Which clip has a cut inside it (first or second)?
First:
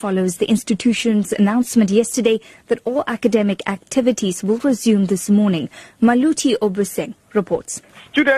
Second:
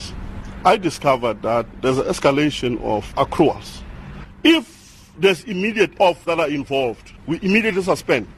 second